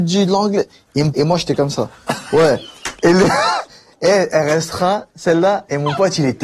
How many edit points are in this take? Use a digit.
1